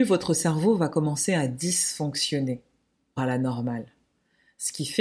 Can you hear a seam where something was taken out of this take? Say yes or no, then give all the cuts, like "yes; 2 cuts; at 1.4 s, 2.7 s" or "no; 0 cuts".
yes; 1 cut; at 3.2 s